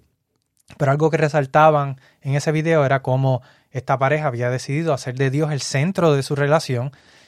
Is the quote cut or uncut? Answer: uncut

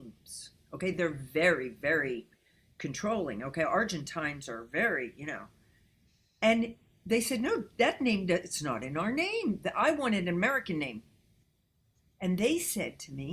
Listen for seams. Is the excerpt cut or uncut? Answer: uncut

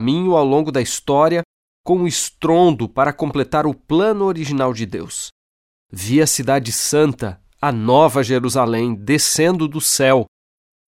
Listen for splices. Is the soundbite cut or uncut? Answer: uncut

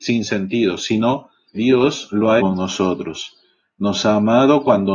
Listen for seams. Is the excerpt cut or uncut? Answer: cut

